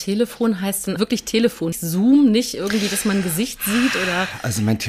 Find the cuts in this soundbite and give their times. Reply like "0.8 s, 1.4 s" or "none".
1.0 s, 1.7 s